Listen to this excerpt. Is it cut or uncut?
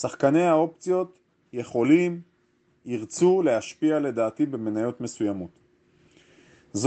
uncut